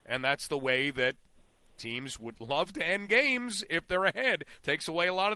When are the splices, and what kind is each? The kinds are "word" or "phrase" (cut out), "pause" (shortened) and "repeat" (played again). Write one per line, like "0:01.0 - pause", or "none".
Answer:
none